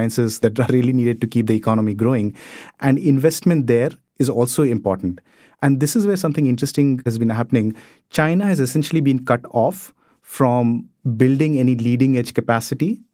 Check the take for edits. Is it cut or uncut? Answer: uncut